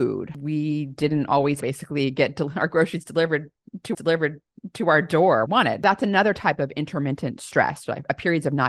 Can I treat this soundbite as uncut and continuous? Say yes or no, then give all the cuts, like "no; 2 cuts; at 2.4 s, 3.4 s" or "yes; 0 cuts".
no; 3 cuts; at 1.6 s, 3.9 s, 5.5 s